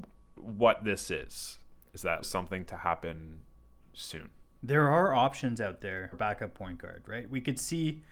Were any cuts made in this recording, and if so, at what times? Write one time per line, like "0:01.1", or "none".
0:02.2
0:04.4
0:06.1